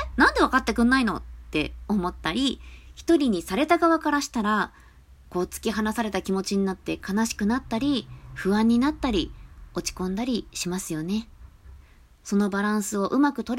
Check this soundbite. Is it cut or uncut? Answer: uncut